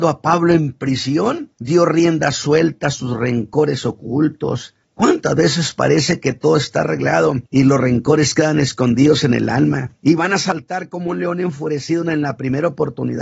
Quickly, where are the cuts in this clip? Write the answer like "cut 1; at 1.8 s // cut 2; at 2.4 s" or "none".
cut 1; at 1.5 s // cut 2; at 4.8 s // cut 3; at 7.5 s // cut 4; at 10.0 s